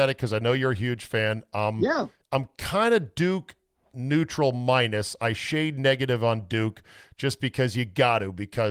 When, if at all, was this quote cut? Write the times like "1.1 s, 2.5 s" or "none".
none